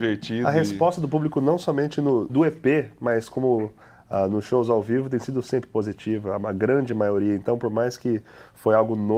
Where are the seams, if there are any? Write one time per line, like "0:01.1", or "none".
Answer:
0:02.3